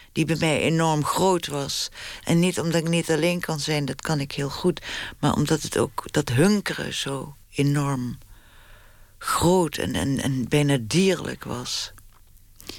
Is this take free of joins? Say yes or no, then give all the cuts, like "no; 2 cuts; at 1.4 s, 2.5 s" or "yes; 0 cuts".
no; 1 cut; at 7.4 s